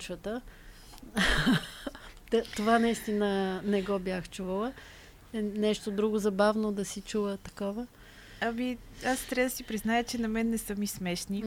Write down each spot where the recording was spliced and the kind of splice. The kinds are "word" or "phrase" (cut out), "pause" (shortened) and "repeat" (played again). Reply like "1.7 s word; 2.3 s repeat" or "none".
none